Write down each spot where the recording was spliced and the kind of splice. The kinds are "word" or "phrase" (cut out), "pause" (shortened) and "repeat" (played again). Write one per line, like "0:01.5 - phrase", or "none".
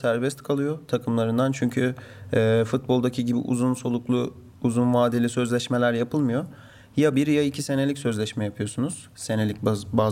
none